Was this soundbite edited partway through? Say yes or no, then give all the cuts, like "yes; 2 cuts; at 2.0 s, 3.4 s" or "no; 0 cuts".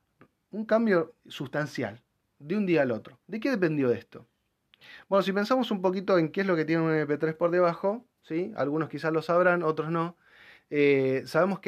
yes; 2 cuts; at 1.2 s, 3.2 s